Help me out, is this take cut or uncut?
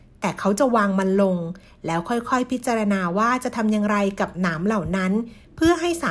uncut